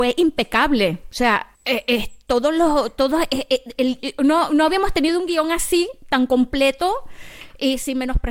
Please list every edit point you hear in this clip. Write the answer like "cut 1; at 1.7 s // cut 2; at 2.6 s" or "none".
cut 1; at 1.5 s // cut 2; at 4.0 s